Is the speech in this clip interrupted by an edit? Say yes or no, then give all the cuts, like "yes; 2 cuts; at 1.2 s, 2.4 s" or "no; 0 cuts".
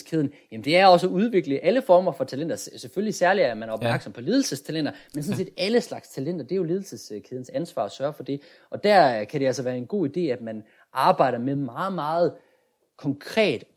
no; 0 cuts